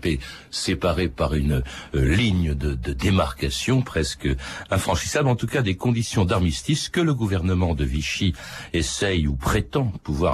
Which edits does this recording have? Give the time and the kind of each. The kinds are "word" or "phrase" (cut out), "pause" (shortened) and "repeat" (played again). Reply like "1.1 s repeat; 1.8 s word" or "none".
none